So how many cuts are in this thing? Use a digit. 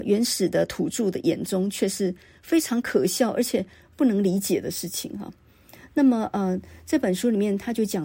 0